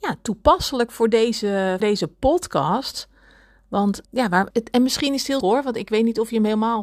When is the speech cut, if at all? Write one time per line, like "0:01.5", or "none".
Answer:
0:01.8
0:04.0
0:04.5
0:05.4